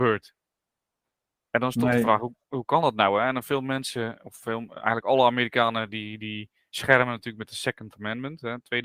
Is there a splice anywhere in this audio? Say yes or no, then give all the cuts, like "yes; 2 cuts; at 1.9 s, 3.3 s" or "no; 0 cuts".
no; 0 cuts